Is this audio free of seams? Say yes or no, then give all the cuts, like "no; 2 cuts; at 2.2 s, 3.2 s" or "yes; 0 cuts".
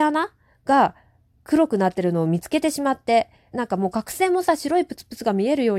no; 1 cut; at 3.5 s